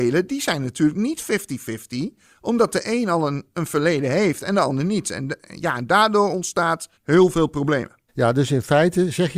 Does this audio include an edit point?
yes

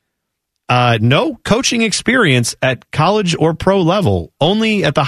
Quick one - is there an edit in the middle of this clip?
no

